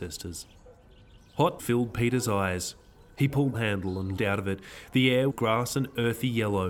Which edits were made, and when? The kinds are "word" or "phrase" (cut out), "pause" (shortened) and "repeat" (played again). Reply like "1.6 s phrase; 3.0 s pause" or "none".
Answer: 1.6 s word; 3.5 s phrase; 4.2 s word; 5.3 s phrase